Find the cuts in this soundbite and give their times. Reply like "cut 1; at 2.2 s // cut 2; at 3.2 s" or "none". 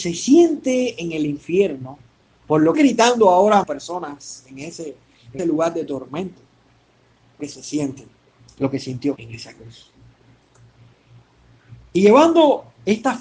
cut 1; at 2.2 s // cut 2; at 2.7 s // cut 3; at 3.6 s // cut 4; at 5.4 s // cut 5; at 7.4 s // cut 6; at 8.2 s // cut 7; at 9.2 s